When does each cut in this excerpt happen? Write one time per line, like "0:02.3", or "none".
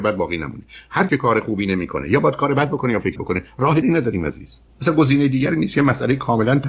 0:01.1
0:03.2
0:03.8
0:04.7

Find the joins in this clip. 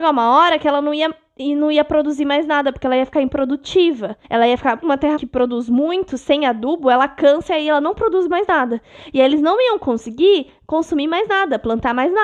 0:04.2
0:04.8
0:05.2

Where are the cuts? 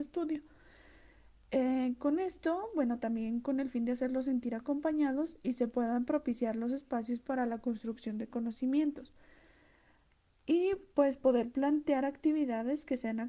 none

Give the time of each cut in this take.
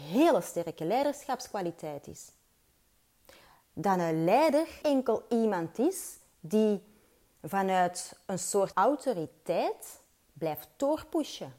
0:04.8
0:08.7

